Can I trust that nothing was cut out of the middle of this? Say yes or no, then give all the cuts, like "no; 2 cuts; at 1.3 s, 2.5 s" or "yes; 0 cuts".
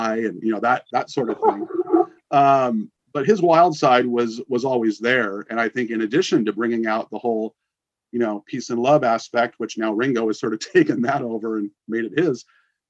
yes; 0 cuts